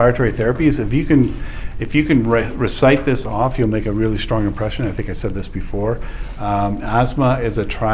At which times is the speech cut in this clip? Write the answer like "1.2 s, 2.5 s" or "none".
none